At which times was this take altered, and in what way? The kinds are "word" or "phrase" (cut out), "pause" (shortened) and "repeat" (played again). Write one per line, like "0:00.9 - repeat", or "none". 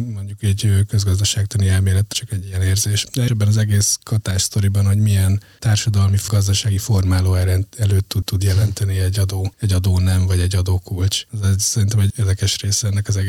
0:02.1 - phrase
0:03.3 - word
0:06.3 - word
0:08.2 - repeat
0:11.3 - pause
0:12.1 - word

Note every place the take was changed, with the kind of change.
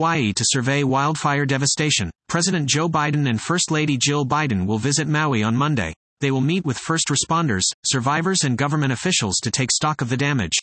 0:02.2 - pause
0:06.0 - pause

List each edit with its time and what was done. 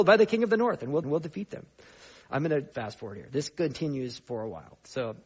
0:01.0 - repeat
0:02.7 - word

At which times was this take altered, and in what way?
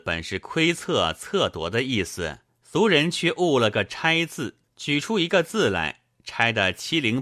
0:02.5 - pause
0:04.7 - pause

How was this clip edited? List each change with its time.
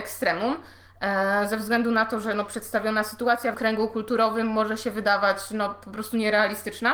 0:03.5 - word

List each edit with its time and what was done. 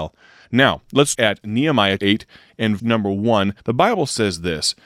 0:01.1 - word
0:02.0 - word
0:02.8 - word
0:03.6 - pause

